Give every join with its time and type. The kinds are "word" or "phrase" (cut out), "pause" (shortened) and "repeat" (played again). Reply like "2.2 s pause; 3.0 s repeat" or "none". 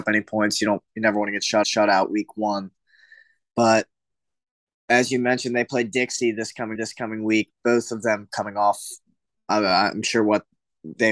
1.6 s repeat; 6.7 s repeat